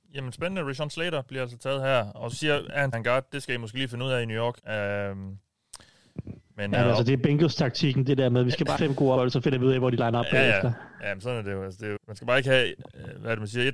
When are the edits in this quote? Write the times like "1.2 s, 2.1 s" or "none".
2.3 s, 2.9 s, 4.6 s, 8.8 s, 9.2 s, 12.0 s